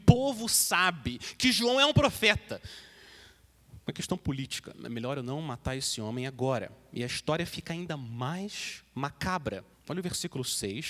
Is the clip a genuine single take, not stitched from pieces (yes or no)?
no